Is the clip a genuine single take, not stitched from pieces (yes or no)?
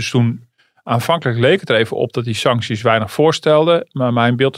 yes